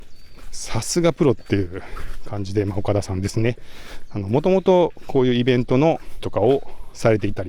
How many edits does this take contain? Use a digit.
1